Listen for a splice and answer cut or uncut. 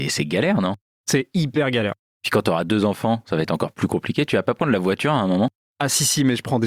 uncut